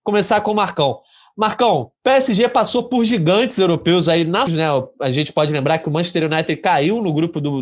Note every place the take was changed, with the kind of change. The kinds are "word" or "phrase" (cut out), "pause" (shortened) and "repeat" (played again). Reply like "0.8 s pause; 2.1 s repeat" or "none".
2.0 s pause; 4.5 s phrase